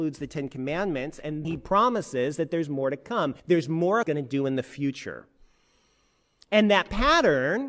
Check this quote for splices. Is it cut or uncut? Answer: cut